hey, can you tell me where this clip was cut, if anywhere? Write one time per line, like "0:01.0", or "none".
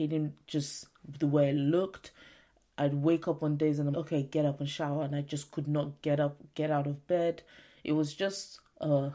0:03.9